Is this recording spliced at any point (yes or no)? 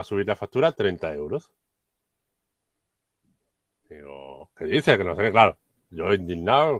yes